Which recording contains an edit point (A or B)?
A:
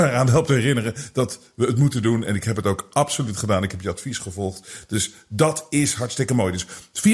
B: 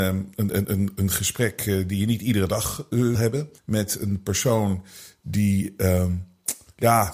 B